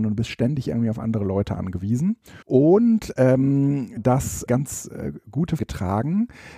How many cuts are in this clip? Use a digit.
4